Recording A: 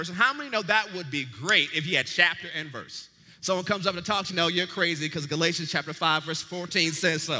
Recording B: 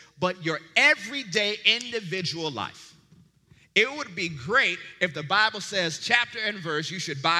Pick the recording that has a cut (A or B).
A